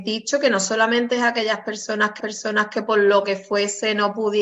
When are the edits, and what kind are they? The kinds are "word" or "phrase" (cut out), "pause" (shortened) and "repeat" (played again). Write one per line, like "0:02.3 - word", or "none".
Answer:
0:02.2 - repeat